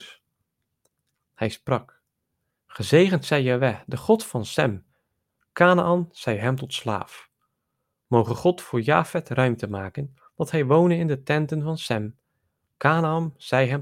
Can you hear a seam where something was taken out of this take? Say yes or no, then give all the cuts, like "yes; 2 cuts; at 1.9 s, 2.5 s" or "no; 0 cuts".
no; 0 cuts